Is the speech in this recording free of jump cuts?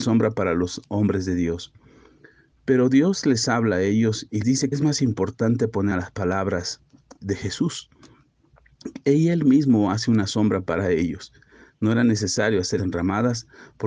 no; 5 cuts; at 4.4 s, 4.7 s, 5.9 s, 7.2 s, 12.8 s

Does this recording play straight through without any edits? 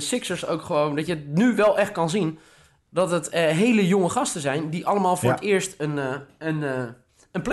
yes; 0 cuts

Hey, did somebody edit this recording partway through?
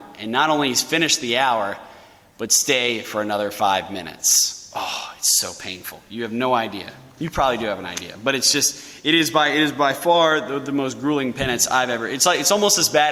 no; 0 cuts

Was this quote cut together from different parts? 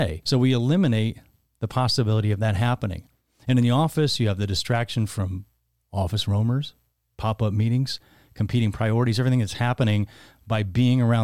no; 0 cuts

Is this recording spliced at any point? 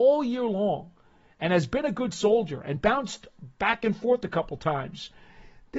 no; 0 cuts

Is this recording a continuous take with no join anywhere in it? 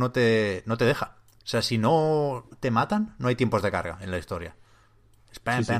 yes; 0 cuts

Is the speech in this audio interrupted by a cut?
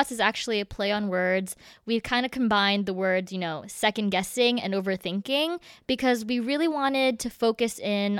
no; 0 cuts

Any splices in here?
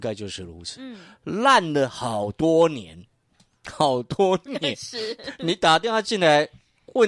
no; 0 cuts

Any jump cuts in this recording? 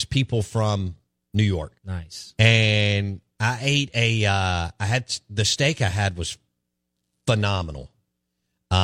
yes; 1 cut; at 1.8 s

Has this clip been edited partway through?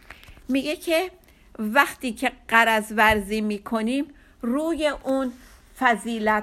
no; 0 cuts

